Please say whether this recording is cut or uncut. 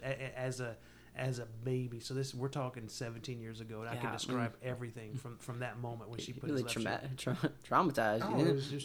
uncut